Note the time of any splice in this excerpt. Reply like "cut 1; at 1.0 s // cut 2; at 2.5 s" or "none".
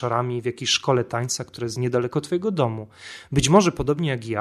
none